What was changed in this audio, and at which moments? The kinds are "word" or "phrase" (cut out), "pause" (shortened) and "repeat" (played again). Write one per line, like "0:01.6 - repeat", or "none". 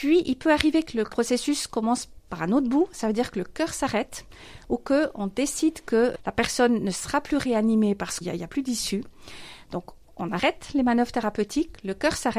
0:01.1 - word
0:08.2 - word